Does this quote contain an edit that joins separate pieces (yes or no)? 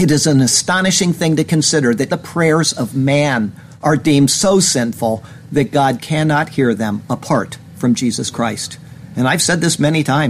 yes